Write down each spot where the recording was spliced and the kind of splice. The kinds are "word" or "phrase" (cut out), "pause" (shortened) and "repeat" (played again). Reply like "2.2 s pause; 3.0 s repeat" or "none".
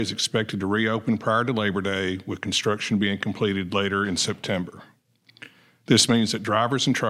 none